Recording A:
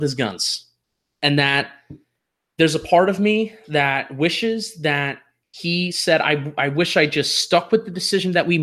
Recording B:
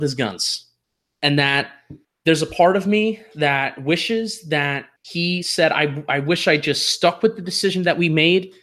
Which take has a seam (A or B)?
B